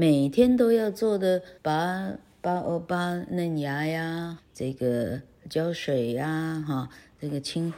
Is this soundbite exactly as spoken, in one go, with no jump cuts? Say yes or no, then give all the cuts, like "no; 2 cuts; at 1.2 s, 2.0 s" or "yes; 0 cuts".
no; 2 cuts; at 1.6 s, 4.4 s